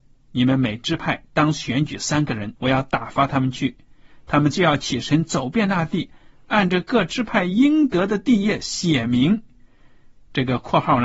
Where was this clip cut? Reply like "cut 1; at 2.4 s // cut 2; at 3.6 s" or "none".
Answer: cut 1; at 2.6 s